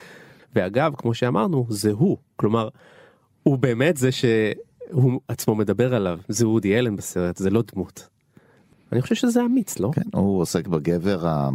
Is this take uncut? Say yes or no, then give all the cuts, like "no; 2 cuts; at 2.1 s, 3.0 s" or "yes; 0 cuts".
yes; 0 cuts